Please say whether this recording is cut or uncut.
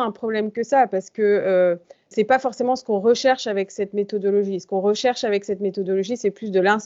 uncut